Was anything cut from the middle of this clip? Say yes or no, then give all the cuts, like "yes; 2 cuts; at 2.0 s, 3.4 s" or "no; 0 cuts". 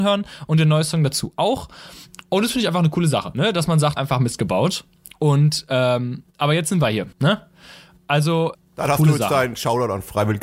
yes; 4 cuts; at 4.0 s, 6.3 s, 7.1 s, 8.5 s